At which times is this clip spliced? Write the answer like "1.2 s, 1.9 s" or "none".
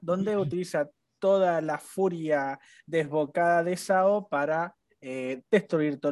none